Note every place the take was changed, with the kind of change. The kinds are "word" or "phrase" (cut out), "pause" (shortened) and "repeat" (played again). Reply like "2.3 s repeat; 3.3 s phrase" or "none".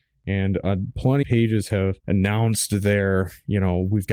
1.2 s word; 2.0 s pause